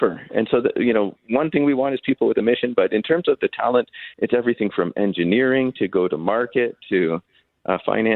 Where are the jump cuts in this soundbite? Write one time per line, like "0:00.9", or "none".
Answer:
0:03.4
0:04.1